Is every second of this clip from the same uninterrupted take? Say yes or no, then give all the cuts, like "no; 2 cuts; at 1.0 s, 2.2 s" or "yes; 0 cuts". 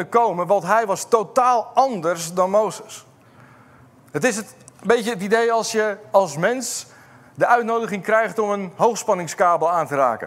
yes; 0 cuts